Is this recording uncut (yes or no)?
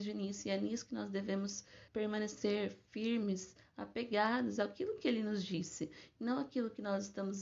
no